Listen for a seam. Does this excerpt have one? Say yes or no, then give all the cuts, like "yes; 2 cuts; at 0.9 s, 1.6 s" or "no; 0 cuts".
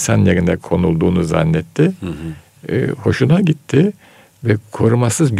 no; 0 cuts